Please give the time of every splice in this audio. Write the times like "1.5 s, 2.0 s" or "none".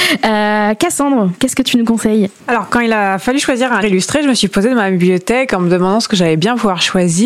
2.4 s, 3.8 s